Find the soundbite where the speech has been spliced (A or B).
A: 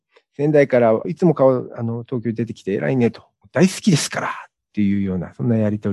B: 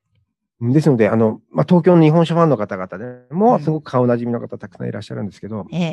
A